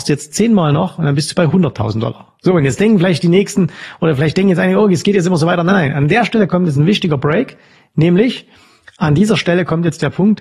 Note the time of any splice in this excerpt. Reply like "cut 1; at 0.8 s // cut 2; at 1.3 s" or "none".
none